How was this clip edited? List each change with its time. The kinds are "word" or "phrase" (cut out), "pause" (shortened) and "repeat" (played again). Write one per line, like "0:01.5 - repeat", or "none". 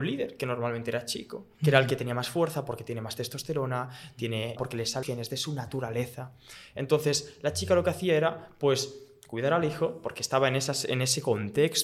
0:04.6 - phrase
0:05.0 - phrase

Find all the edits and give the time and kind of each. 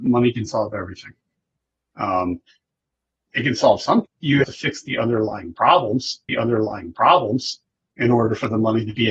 0:03.3 - word
0:04.1 - phrase
0:04.4 - word
0:06.3 - repeat

